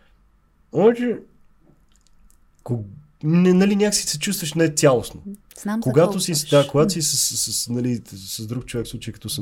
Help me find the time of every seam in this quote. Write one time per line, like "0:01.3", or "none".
none